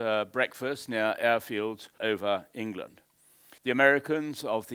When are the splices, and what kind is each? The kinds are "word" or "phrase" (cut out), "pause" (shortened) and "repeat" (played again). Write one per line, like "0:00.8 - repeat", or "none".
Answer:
0:02.0 - word
0:03.6 - pause